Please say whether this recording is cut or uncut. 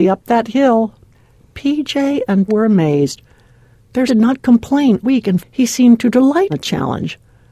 cut